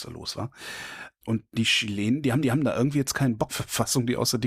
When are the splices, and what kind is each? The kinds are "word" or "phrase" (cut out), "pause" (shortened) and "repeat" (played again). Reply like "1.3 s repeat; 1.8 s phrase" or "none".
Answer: 2.4 s repeat; 3.5 s phrase